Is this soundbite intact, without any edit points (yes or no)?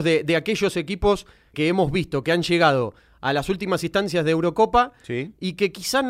no